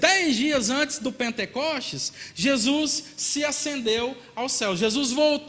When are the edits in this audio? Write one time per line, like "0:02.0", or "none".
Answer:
none